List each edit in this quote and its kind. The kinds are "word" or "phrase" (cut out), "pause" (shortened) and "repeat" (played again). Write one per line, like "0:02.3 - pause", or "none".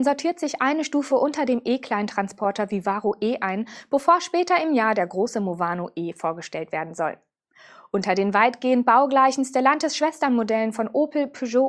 none